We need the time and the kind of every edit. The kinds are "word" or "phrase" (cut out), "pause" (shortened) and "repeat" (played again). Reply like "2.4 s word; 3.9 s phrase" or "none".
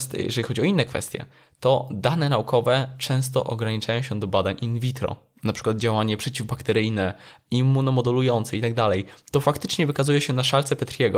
none